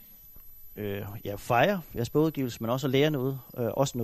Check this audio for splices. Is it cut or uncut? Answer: uncut